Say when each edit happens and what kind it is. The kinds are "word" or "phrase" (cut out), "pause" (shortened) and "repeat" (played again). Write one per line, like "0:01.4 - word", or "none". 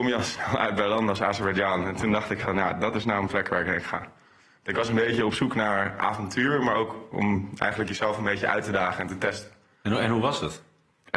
none